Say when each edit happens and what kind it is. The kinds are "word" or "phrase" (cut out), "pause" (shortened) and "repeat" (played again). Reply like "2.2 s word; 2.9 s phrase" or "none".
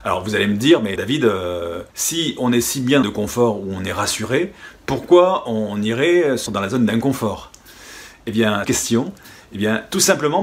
1.0 s word; 1.9 s pause; 3.0 s phrase; 6.5 s word; 8.6 s phrase

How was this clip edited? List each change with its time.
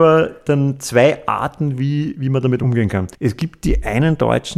3.1 s pause

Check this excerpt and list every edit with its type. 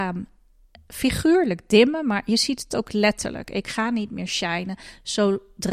none

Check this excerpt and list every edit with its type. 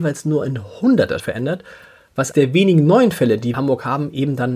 1.2 s word; 2.3 s word; 3.5 s phrase

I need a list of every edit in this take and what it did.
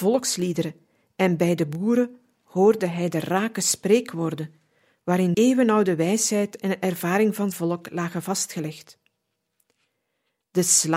5.3 s word; 7.5 s word

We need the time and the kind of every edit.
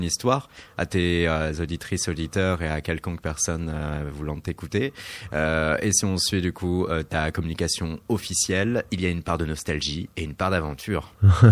none

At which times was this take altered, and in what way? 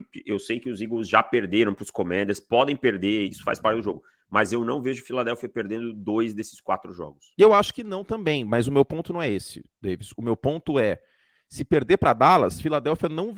none

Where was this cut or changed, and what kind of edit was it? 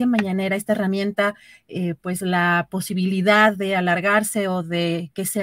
none

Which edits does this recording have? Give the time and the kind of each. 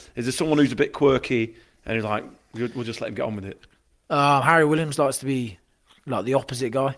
none

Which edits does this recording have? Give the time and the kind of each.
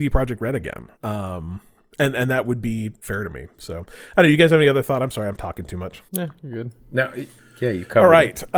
1.0 s pause; 6.1 s pause; 6.8 s pause; 7.4 s pause

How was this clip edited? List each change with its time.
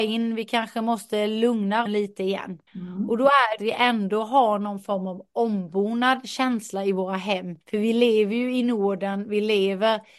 1.9 s word; 2.7 s pause; 3.6 s phrase; 7.6 s pause

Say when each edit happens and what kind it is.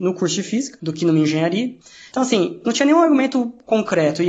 none

